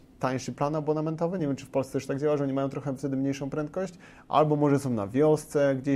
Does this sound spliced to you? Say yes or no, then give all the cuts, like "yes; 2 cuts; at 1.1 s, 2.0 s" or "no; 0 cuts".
no; 0 cuts